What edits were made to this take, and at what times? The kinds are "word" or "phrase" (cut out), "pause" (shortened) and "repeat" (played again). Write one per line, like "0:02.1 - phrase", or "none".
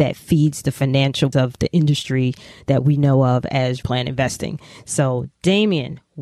0:01.3 - word
0:03.8 - word